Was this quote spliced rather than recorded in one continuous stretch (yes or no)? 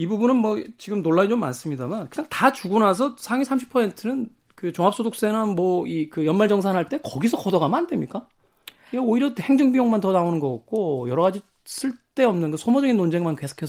no